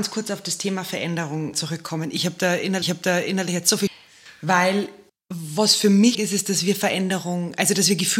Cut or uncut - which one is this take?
cut